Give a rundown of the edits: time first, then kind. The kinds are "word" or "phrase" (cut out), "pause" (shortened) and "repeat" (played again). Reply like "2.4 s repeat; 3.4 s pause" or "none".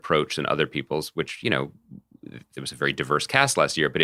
none